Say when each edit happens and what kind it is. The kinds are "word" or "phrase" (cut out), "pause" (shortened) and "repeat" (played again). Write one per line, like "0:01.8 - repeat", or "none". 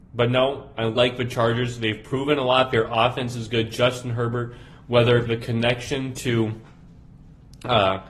0:05.3 - word